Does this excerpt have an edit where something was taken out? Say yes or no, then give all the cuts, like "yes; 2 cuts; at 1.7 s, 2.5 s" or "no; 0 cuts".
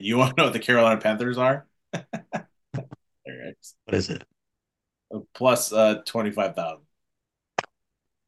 yes; 1 cut; at 3.8 s